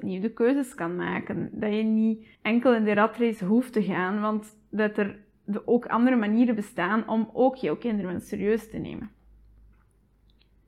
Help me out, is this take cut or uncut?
cut